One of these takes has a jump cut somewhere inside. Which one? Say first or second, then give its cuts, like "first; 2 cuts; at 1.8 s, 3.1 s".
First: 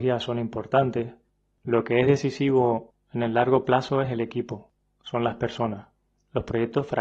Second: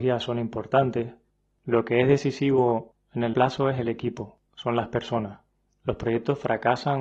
second; 2 cuts; at 3.3 s, 4.5 s